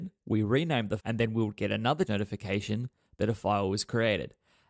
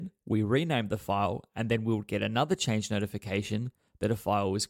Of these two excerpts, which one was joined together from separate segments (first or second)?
first